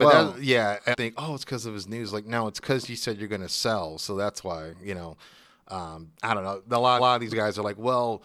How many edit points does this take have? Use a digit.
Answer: 4